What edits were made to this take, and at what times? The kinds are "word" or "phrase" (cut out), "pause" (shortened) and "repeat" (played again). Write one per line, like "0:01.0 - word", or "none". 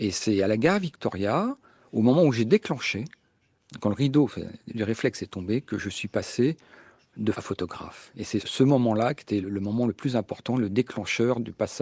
0:07.3 - word
0:08.4 - word
0:09.4 - word